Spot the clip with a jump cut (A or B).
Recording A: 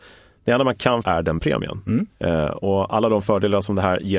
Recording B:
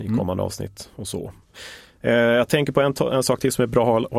A